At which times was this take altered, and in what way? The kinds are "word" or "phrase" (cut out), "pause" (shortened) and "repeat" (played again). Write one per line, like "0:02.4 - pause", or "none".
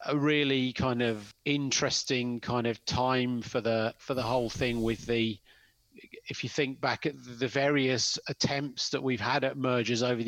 0:07.1 - word